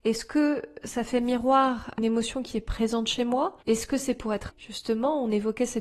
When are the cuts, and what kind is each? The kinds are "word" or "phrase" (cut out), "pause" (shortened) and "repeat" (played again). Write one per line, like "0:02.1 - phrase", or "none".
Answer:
0:02.0 - word
0:03.6 - pause
0:04.5 - word